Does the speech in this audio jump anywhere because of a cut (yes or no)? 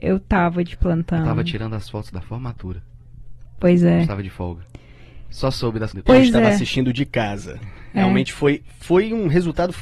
yes